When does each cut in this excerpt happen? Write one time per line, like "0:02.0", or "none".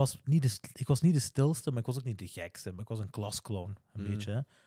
none